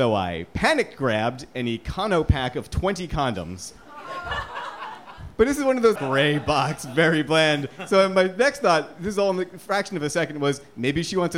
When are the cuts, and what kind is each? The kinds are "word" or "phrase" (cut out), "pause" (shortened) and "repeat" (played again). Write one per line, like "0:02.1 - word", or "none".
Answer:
0:05.3 - pause
0:06.0 - phrase